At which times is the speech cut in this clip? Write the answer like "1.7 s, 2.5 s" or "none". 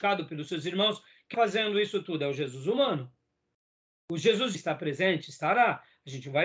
1.3 s, 4.5 s